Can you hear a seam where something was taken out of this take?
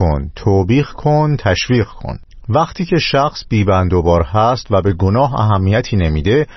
no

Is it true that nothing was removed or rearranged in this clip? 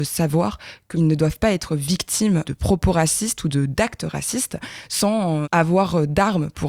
no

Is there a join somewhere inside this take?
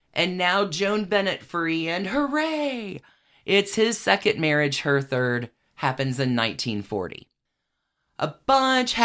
no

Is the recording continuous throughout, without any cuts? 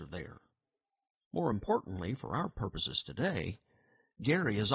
yes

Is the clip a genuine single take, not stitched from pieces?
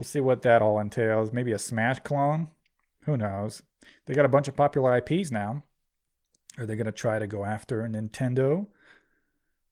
yes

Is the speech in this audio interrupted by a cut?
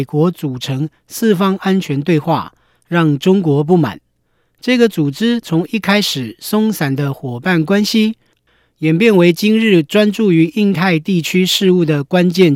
no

